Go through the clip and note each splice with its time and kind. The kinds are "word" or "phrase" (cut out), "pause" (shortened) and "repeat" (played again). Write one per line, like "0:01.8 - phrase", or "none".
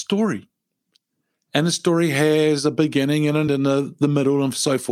0:03.5 - word